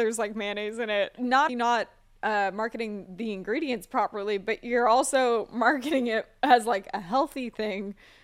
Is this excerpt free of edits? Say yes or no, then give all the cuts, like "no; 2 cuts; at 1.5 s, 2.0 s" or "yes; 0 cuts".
no; 1 cut; at 1.5 s